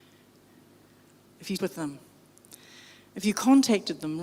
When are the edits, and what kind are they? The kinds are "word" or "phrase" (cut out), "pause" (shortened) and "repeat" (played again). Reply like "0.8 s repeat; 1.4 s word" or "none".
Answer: 1.6 s word